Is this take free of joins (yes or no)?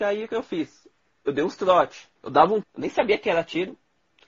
no